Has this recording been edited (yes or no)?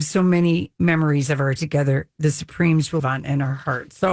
yes